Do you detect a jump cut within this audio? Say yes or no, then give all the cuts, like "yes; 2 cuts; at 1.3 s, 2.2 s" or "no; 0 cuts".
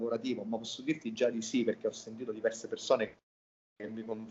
no; 0 cuts